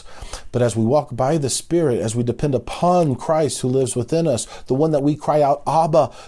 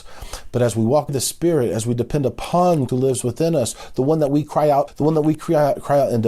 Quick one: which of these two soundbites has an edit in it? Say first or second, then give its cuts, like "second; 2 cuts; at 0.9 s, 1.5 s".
second; 3 cuts; at 1.1 s, 2.9 s, 4.9 s